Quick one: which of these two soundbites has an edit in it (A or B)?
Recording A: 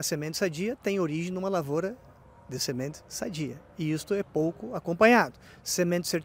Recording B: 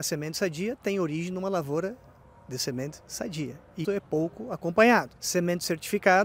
B